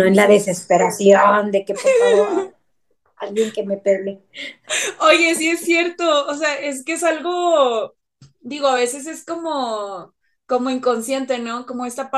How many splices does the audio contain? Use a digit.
0